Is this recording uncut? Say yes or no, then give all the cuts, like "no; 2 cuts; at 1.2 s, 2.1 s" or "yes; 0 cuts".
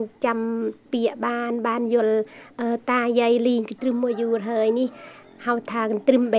yes; 0 cuts